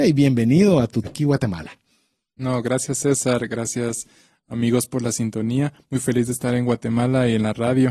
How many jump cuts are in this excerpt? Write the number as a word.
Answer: one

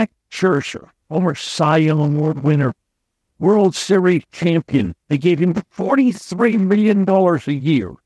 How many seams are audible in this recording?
one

